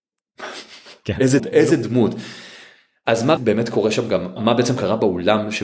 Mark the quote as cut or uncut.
cut